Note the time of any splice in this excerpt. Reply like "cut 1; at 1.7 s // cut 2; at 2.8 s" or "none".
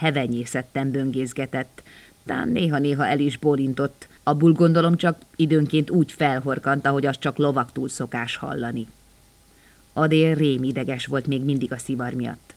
none